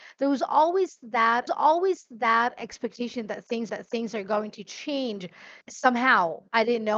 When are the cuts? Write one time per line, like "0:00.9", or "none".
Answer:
0:01.5
0:03.7
0:05.6